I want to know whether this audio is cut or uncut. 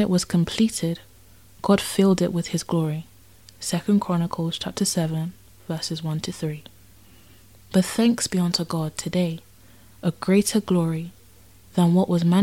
uncut